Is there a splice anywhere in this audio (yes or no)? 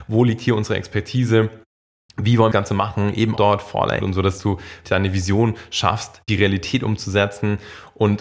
yes